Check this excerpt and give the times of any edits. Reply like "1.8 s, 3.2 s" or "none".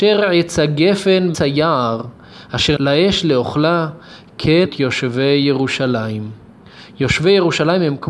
1.3 s, 2.8 s, 4.7 s